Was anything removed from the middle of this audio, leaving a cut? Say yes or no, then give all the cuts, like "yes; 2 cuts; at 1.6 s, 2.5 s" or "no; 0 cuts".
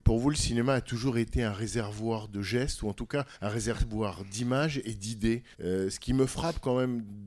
yes; 2 cuts; at 3.3 s, 5.5 s